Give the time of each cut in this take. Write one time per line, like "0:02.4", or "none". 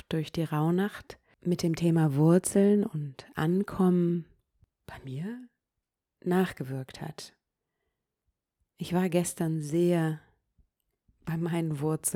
none